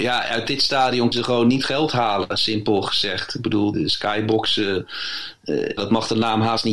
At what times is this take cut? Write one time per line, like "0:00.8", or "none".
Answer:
0:01.1
0:01.7
0:03.7
0:05.8

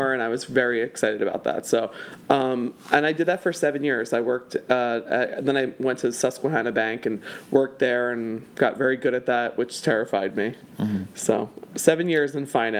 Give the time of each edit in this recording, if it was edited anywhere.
none

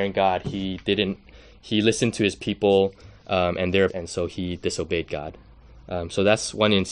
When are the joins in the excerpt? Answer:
0:03.9

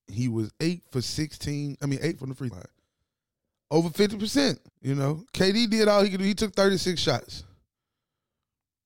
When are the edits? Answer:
0:02.2
0:02.5
0:04.7

